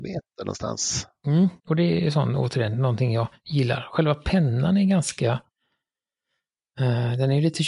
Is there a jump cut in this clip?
yes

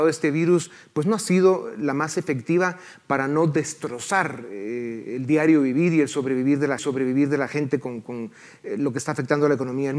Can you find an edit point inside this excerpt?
yes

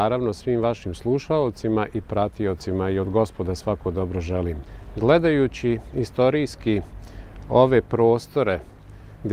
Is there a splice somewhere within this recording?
no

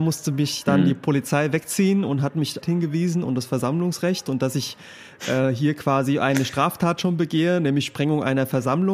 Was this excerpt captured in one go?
no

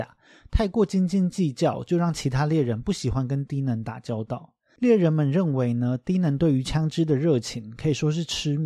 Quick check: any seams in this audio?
no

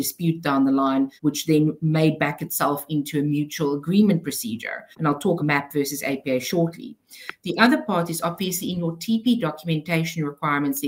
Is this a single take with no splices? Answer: no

